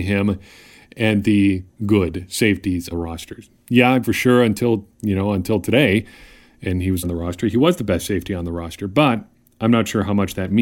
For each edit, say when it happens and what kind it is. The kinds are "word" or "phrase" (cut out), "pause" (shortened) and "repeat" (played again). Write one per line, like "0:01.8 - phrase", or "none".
0:01.7 - word
0:02.9 - word
0:04.0 - word
0:04.9 - pause
0:07.0 - phrase

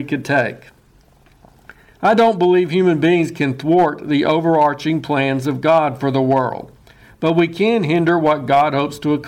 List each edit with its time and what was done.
none

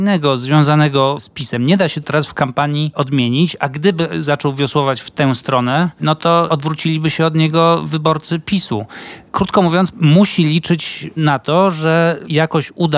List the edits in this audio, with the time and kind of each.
0:02.0 - word
0:09.9 - word

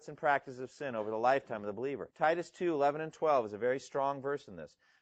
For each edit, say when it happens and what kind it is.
0:02.1 - pause

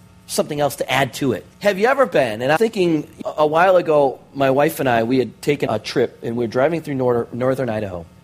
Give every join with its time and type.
0:01.5 - pause
0:02.6 - word
0:03.2 - word
0:05.7 - word

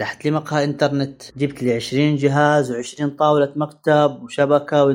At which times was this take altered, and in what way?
0:01.3 - pause

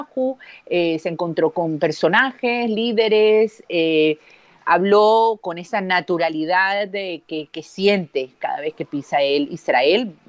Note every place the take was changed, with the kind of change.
0:05.4 - word

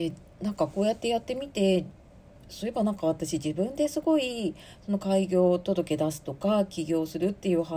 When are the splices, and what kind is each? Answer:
none

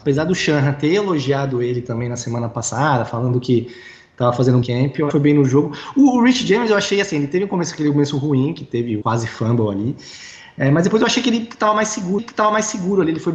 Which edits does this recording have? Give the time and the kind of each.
0:04.6 - phrase
0:05.1 - phrase
0:09.0 - word
0:12.2 - repeat

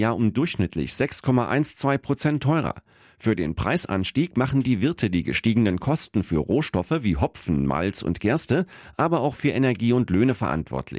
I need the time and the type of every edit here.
none

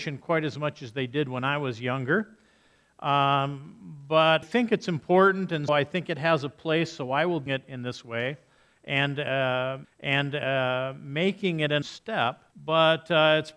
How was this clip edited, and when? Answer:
0:04.4 - word
0:05.7 - word
0:07.5 - word
0:09.8 - repeat
0:11.8 - word
0:12.5 - pause

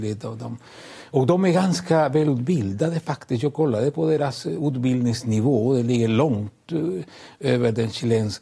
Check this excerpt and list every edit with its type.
none

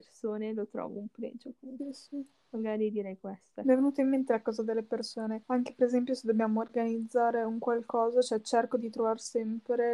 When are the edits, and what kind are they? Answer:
0:05.4 - pause

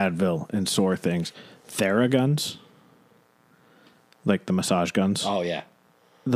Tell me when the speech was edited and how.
none

